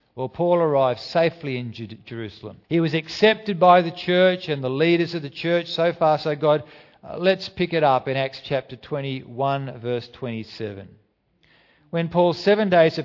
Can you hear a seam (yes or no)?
yes